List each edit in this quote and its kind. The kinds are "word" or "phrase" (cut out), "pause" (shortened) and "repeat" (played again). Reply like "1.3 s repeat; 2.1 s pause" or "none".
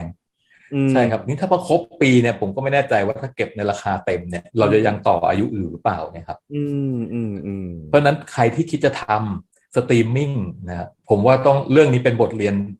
4.5 s pause; 11.0 s pause